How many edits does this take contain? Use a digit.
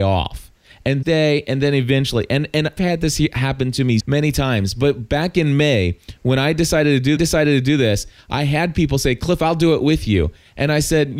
4